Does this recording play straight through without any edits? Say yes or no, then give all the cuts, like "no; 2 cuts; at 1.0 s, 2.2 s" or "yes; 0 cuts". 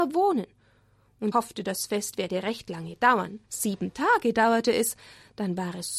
no; 1 cut; at 1.3 s